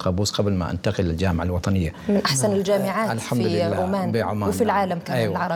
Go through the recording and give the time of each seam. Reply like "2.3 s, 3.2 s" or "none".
none